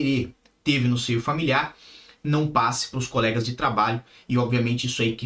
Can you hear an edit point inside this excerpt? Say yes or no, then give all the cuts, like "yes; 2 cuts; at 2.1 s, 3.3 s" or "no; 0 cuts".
no; 0 cuts